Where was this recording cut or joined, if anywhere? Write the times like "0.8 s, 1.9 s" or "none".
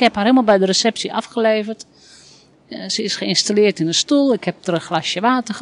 none